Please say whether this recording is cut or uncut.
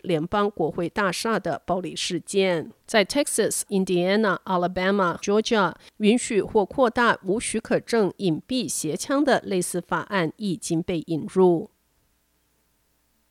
cut